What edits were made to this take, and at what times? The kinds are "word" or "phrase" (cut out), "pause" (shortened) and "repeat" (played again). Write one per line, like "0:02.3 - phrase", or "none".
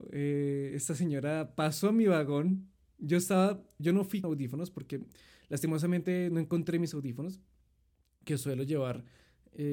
0:03.8 - word
0:04.2 - word